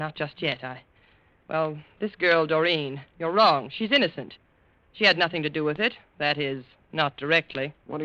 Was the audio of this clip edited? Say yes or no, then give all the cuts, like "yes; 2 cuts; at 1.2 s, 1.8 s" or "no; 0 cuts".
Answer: yes; 1 cut; at 3.1 s